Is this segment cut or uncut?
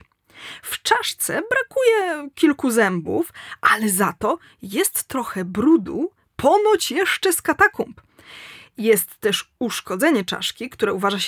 uncut